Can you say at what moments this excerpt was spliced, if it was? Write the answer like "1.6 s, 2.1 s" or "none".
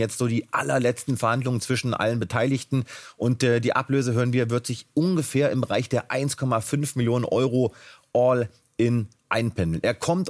none